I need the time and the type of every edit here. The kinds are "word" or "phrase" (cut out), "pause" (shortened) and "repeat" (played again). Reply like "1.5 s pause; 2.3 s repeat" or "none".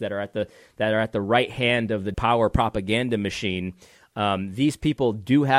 2.1 s word